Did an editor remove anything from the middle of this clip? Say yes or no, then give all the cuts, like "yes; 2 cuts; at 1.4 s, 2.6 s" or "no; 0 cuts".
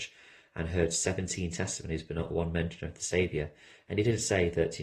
no; 0 cuts